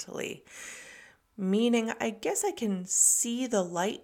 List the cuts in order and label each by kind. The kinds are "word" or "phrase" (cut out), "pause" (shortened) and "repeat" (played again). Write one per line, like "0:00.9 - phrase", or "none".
none